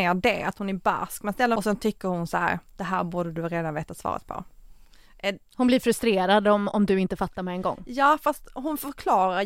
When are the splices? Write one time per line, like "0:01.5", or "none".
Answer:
0:01.6
0:02.7